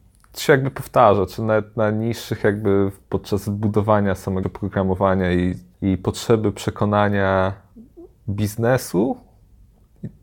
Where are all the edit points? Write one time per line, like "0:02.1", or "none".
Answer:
0:04.4